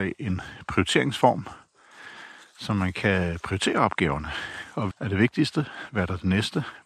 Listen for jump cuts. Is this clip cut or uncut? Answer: cut